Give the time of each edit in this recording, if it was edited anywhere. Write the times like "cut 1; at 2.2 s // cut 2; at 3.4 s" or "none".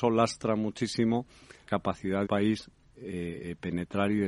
cut 1; at 1.7 s // cut 2; at 2.3 s // cut 3; at 2.9 s